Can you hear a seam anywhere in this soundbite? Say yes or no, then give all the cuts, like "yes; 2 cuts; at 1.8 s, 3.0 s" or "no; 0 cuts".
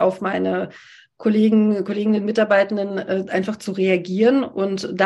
no; 0 cuts